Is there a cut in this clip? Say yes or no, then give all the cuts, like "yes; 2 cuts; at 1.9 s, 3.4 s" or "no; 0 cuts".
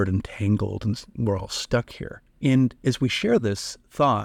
yes; 1 cut; at 2.3 s